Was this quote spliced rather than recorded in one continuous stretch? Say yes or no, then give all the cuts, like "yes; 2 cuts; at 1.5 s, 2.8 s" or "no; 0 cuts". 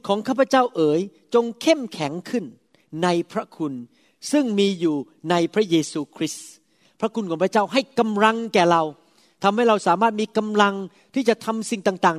no; 0 cuts